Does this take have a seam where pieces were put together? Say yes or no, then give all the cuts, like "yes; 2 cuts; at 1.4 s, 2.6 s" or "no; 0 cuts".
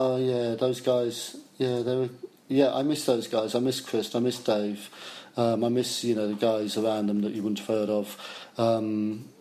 no; 0 cuts